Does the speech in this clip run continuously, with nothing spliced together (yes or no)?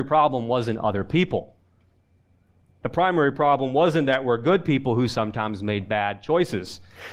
yes